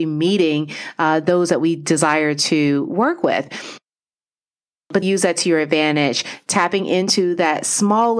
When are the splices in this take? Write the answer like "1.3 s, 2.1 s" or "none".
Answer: 5.0 s

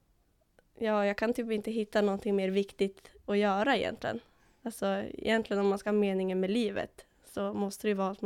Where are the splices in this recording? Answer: 5.8 s

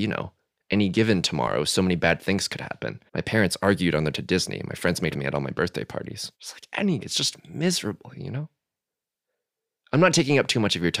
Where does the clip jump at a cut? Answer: 3.1 s, 4.1 s, 5.1 s, 6.3 s, 7.0 s

